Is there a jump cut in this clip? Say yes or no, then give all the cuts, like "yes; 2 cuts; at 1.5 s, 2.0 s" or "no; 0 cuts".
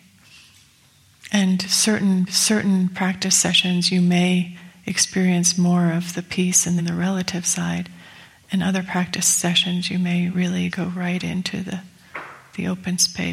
yes; 3 cuts; at 2.3 s, 6.8 s, 10.7 s